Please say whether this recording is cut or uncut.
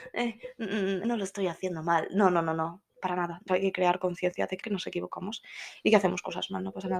cut